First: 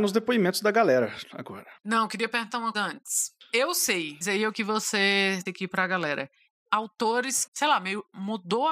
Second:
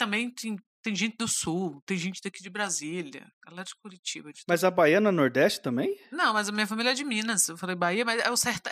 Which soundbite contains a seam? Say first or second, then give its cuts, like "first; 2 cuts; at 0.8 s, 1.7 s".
first; 5 cuts; at 2.7 s, 4.2 s, 4.5 s, 5.5 s, 7.5 s